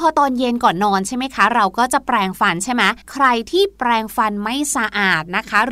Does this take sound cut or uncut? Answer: cut